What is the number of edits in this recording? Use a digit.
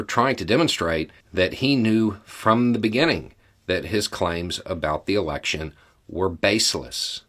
2